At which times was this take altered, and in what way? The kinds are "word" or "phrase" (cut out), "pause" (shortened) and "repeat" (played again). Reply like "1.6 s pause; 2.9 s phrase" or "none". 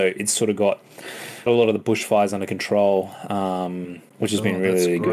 1.5 s word; 4.1 s pause